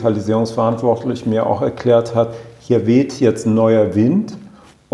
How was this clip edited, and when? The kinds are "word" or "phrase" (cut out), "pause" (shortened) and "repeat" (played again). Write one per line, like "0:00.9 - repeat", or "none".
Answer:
none